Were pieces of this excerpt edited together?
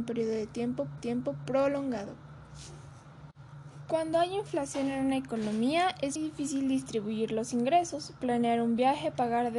yes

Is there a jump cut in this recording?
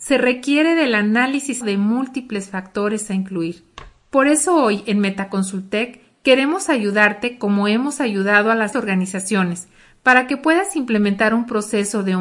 yes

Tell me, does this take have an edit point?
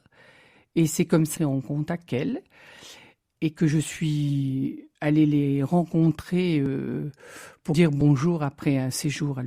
yes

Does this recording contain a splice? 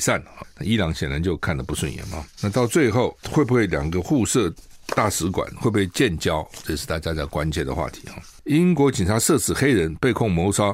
yes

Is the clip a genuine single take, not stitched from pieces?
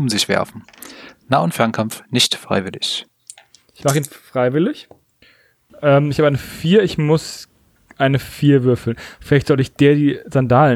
yes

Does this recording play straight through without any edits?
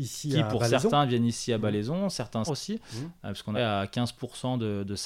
no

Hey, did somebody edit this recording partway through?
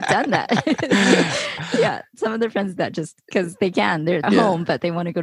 yes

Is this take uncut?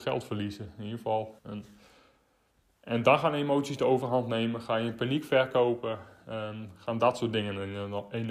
no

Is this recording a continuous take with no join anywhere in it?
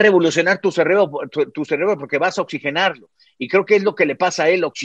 yes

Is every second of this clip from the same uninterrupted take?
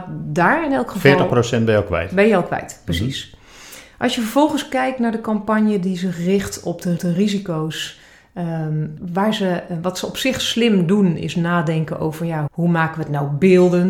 no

